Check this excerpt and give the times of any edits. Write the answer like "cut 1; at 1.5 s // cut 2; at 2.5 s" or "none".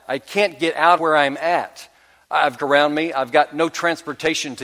cut 1; at 1.0 s // cut 2; at 2.6 s